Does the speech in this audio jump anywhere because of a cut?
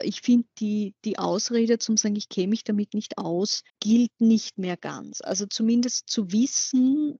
yes; 1 cut; at 3.7 s

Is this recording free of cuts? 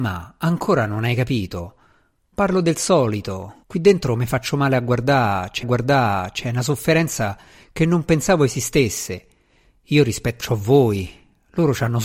no; 3 cuts; at 3.6 s, 5.6 s, 10.4 s

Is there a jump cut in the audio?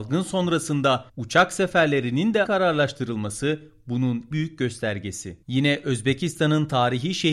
yes; 4 cuts; at 1.1 s, 2.4 s, 4.3 s, 5.4 s

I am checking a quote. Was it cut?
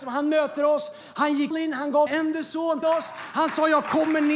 yes; 3 cuts; at 1.5 s, 2.1 s, 2.8 s

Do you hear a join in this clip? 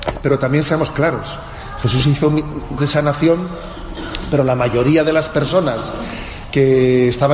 yes; 1 cut; at 2.8 s

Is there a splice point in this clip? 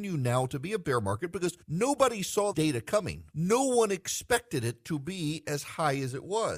yes; 3 cuts; at 1.6 s, 2.5 s, 3.3 s

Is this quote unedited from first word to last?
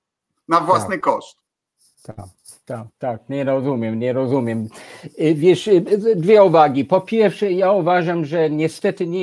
no; 1 cut; at 2.9 s

